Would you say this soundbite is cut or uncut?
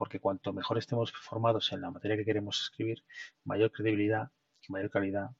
uncut